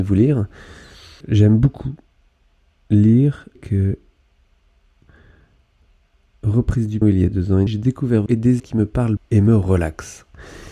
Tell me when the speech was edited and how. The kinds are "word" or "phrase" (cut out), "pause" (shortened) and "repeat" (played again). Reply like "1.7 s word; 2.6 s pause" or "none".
1.2 s word; 3.5 s word; 7.0 s word; 7.7 s word; 8.3 s word; 8.6 s word; 9.2 s word